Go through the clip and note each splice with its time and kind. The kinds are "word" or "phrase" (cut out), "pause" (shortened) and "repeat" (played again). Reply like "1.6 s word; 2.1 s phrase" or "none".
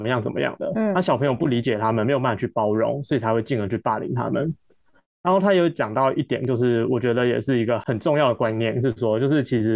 none

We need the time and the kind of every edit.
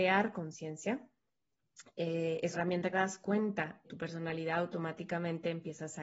2.5 s word; 2.9 s phrase; 3.8 s word

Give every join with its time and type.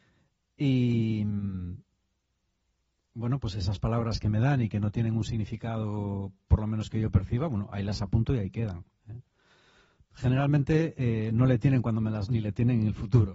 12.3 s word

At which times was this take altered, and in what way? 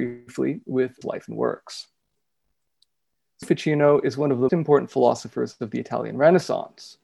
1.0 s word; 3.4 s word; 4.5 s word

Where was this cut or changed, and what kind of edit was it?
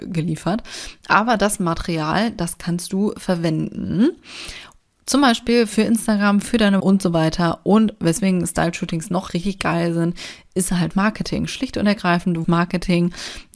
6.8 s word; 9.3 s word; 10.9 s word; 12.4 s word

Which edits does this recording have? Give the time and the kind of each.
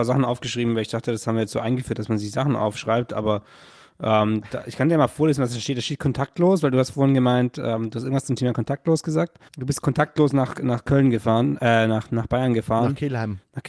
9.5 s pause

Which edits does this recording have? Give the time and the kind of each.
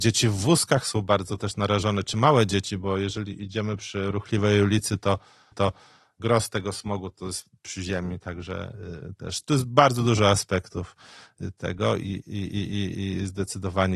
5.5 s repeat

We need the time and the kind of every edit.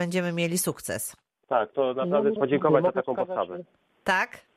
1.7 s word; 2.4 s word

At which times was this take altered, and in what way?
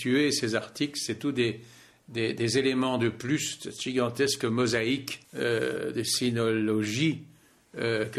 5.2 s pause

